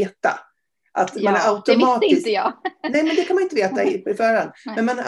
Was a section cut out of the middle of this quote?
no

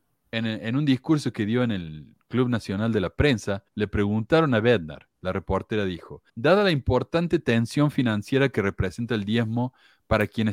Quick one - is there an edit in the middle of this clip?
yes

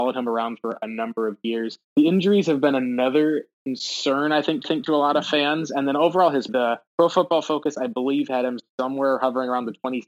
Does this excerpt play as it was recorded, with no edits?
no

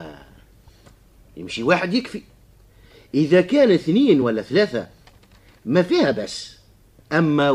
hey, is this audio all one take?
yes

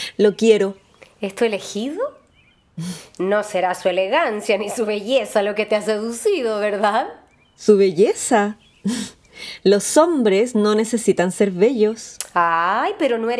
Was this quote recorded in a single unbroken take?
yes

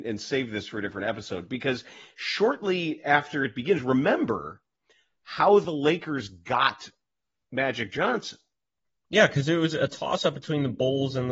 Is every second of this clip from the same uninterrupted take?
yes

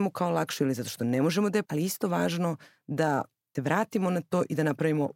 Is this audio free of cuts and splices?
no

